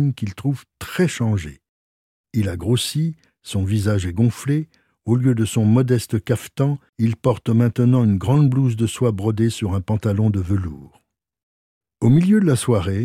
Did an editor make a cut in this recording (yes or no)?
no